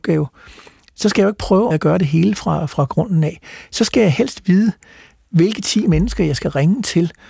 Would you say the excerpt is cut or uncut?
cut